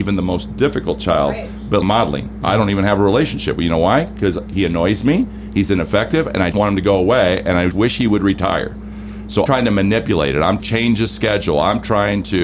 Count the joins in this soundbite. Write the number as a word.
five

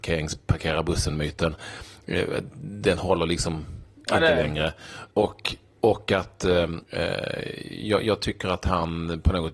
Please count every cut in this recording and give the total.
two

